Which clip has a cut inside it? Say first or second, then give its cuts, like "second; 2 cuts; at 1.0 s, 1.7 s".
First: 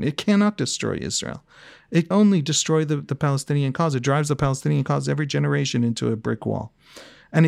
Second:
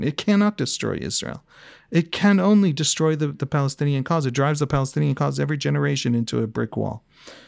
first; 1 cut; at 2.1 s